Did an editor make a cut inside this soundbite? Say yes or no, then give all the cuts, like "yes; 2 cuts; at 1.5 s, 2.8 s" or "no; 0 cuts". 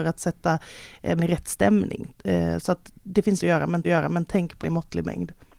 yes; 4 cuts; at 1.2 s, 3.4 s, 3.8 s, 4.6 s